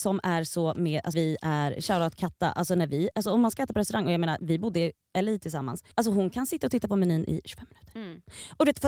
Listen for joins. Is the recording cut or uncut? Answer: cut